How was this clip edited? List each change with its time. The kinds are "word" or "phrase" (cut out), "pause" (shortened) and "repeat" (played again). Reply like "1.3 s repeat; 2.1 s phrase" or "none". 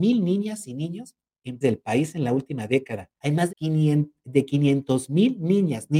1.6 s word; 3.2 s pause; 3.5 s word